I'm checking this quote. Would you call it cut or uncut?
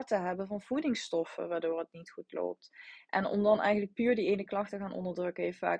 uncut